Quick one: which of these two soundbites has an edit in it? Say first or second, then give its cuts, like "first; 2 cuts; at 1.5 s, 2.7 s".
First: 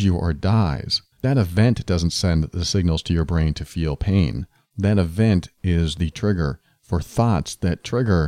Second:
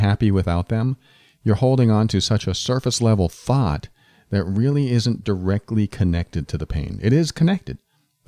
first; 1 cut; at 1.1 s